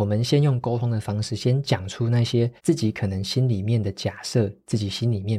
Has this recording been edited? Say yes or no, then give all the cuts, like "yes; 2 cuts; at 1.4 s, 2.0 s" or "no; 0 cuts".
yes; 1 cut; at 2.6 s